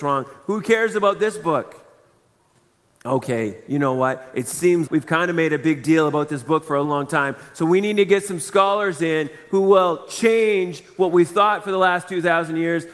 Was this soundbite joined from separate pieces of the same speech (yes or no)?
yes